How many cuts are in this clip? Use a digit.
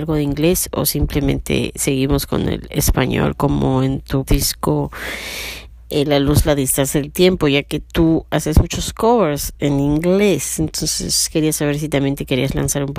1